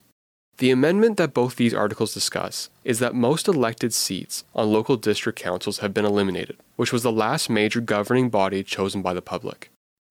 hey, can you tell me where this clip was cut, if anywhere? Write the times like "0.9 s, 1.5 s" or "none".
none